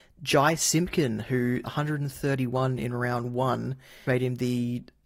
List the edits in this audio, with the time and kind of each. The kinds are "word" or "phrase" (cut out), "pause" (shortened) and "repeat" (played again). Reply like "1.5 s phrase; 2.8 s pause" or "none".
1.6 s word; 4.1 s word